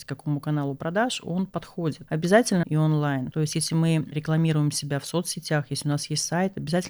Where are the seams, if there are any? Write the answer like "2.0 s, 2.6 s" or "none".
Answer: 2.6 s